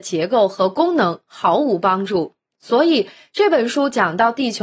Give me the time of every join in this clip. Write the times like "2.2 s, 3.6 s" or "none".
none